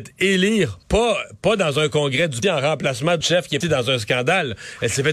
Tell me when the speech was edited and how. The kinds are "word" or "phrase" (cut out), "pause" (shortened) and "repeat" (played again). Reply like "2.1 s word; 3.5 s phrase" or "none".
2.4 s word; 3.2 s word; 3.6 s word